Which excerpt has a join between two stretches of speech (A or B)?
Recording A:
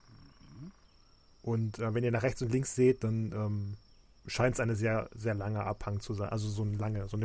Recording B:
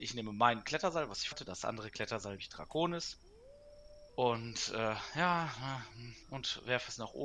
B